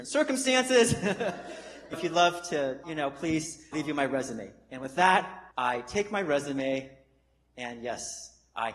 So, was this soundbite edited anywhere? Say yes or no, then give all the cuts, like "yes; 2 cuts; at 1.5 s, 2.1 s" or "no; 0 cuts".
yes; 4 cuts; at 1.9 s, 2.8 s, 3.7 s, 5.5 s